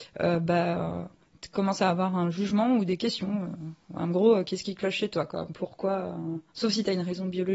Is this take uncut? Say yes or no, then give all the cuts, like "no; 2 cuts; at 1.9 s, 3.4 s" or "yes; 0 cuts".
no; 1 cut; at 6.5 s